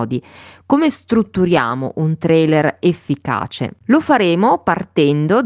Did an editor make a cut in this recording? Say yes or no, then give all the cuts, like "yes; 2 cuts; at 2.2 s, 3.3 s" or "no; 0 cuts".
yes; 1 cut; at 3.8 s